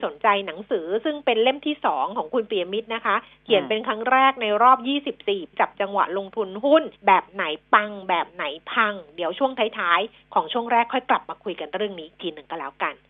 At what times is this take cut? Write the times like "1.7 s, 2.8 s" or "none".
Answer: 5.5 s, 7.0 s